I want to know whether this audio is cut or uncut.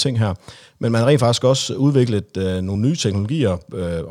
uncut